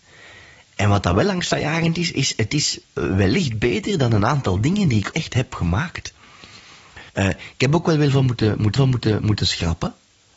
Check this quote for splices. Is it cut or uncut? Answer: cut